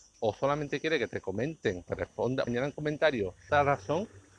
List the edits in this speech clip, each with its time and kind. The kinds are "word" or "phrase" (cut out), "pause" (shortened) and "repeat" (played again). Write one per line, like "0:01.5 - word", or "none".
0:01.9 - word
0:02.5 - word
0:03.5 - word